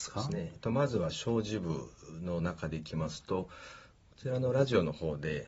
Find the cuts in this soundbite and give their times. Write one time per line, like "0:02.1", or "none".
none